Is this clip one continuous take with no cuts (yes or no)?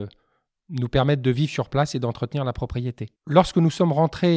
no